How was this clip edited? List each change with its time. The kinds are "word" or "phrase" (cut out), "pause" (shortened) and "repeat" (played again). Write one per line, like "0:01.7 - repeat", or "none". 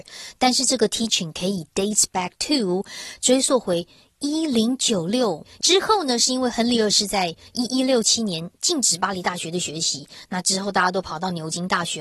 none